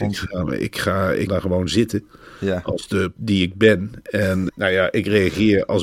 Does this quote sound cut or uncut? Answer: cut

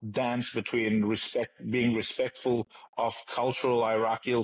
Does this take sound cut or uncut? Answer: uncut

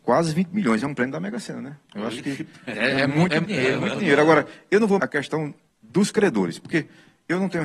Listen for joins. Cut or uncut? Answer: cut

